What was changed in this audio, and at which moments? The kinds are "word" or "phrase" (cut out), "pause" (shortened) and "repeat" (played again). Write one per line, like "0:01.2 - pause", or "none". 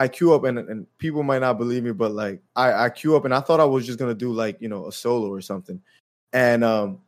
0:02.5 - pause